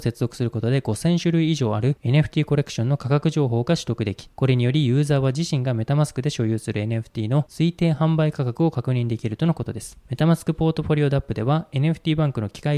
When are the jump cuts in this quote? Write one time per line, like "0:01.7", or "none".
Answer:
none